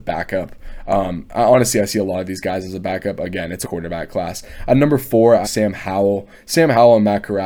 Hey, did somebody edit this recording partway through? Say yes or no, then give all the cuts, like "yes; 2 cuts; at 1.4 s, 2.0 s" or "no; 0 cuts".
yes; 2 cuts; at 3.6 s, 5.4 s